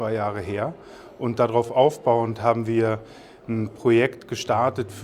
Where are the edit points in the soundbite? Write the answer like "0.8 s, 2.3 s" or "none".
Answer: none